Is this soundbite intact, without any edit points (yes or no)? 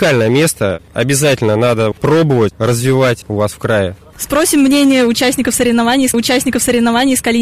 no